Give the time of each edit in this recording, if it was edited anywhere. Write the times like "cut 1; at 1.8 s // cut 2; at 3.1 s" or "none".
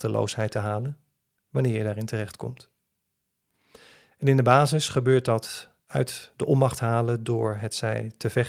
none